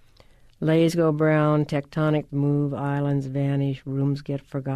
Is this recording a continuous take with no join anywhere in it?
no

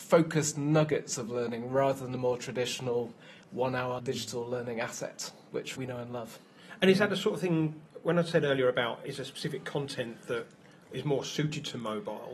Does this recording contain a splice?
yes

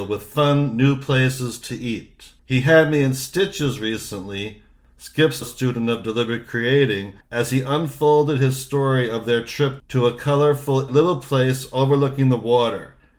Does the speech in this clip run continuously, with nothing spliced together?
no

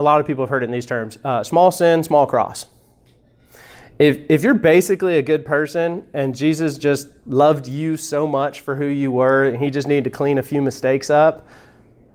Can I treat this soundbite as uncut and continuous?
yes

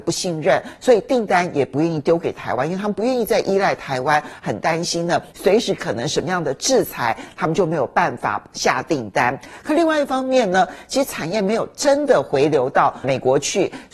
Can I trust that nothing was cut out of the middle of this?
no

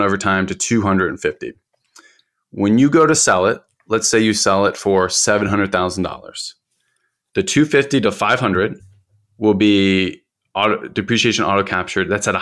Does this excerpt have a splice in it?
no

